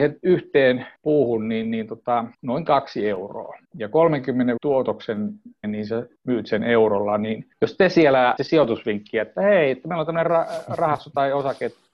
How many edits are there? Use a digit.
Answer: 8